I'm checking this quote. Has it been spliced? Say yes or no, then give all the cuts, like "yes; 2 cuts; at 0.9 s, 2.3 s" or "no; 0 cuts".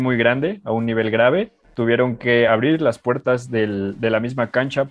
no; 0 cuts